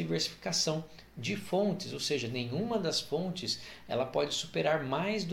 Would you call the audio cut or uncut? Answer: uncut